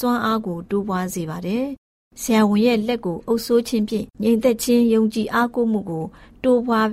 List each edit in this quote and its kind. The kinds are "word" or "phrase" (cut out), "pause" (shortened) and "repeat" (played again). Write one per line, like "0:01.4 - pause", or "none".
0:04.1 - pause